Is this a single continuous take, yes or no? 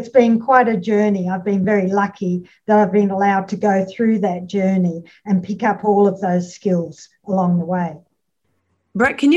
yes